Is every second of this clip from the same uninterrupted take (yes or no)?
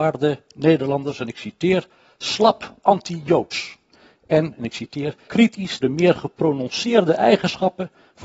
no